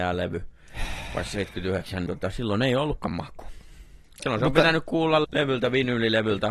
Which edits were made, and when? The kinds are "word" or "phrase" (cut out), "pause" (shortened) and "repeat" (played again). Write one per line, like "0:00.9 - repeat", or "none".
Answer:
0:02.1 - word
0:05.2 - word

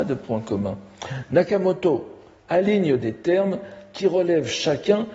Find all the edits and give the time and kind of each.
none

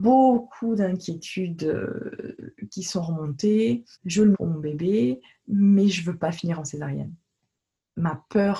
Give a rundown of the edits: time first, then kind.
0:03.9 - pause
0:04.3 - word

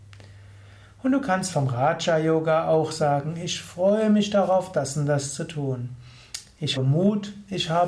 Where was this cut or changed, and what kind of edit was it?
0:06.8 - word

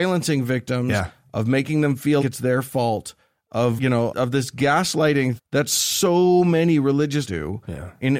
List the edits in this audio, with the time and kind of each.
0:02.2 - word
0:03.8 - word
0:04.1 - word
0:05.4 - word
0:07.2 - word

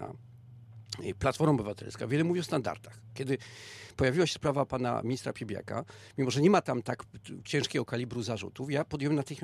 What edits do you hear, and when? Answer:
none

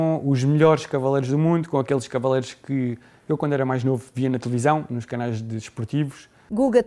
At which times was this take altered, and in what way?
none

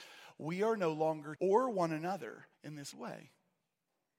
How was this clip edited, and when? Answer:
0:01.4 - phrase
0:02.5 - pause
0:02.9 - word

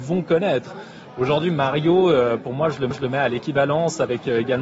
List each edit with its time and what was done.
0:02.9 - repeat

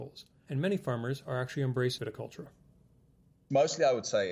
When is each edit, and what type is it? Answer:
0:02.0 - word

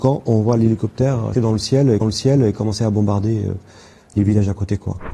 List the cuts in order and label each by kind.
0:01.3 - word
0:02.0 - repeat

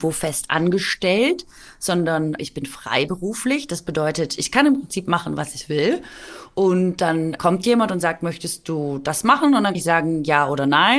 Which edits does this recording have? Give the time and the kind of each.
0:02.4 - word
0:07.4 - word
0:09.7 - word

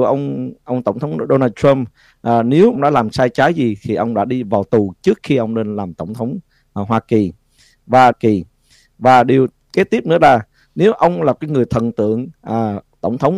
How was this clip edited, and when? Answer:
0:02.8 - word
0:08.1 - repeat

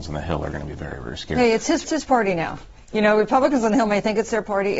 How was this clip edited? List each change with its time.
0:01.8 - word

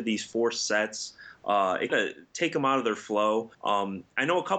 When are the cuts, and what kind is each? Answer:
0:01.9 - phrase
0:03.5 - pause

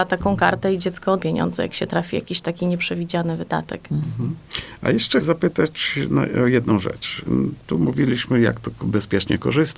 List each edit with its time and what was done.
0:01.2 - phrase
0:05.2 - word

